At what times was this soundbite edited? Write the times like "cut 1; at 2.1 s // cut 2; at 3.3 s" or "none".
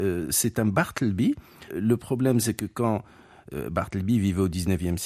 cut 1; at 1.7 s